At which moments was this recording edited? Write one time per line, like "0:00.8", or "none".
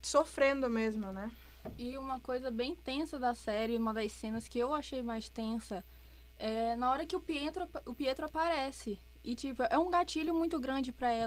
none